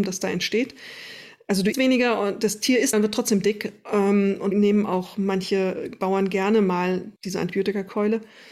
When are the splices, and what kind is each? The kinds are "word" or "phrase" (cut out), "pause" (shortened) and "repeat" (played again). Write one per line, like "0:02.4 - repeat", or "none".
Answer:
0:01.7 - word
0:02.9 - word
0:04.5 - word
0:07.2 - pause